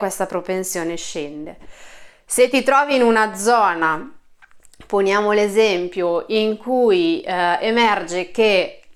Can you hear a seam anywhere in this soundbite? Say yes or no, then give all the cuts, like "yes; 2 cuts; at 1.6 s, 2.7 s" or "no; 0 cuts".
no; 0 cuts